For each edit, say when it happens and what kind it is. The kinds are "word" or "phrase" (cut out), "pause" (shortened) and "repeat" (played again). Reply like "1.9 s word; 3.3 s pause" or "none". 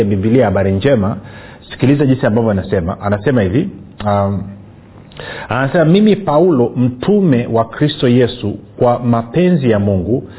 none

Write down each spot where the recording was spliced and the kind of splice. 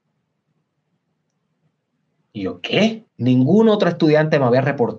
3.1 s pause

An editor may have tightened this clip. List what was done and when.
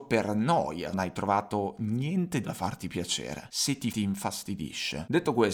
0.9 s phrase; 2.4 s word; 3.9 s word

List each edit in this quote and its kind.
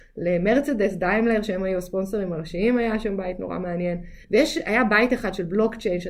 4.2 s pause

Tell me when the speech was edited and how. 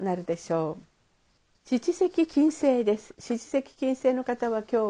1.4 s pause

